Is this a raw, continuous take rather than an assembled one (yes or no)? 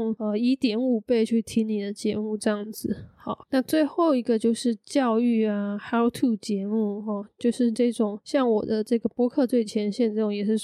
yes